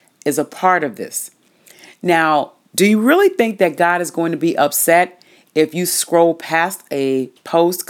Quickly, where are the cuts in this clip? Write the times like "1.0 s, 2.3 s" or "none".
none